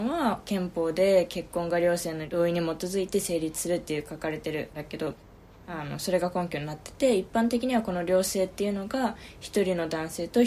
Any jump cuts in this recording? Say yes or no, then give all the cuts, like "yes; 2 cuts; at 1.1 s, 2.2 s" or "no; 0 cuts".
no; 0 cuts